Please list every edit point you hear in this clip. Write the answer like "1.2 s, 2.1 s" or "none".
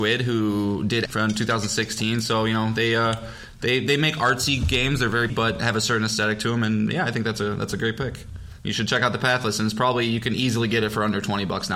1.1 s, 5.3 s